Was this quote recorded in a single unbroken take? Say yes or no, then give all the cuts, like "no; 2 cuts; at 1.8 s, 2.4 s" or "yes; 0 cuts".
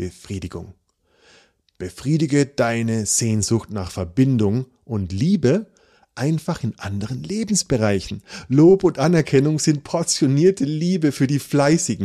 yes; 0 cuts